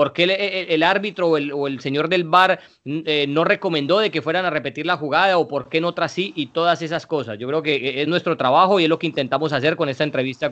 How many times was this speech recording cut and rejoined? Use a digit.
0